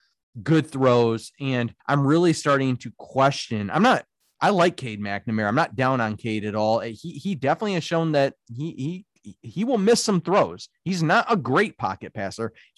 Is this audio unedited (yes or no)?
no